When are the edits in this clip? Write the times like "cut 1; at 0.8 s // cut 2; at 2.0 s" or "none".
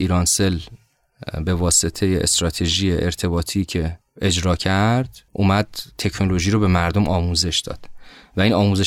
cut 1; at 5.3 s